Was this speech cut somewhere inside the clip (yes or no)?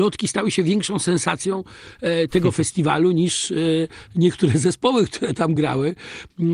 no